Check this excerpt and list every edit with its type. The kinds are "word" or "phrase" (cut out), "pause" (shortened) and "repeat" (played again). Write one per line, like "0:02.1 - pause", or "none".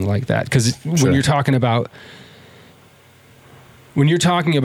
none